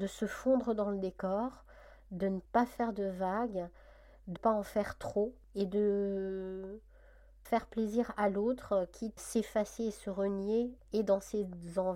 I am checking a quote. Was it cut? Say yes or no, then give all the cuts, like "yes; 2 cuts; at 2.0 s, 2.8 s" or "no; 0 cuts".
yes; 6 cuts; at 2.4 s, 4.4 s, 5.4 s, 7.5 s, 9.2 s, 10.8 s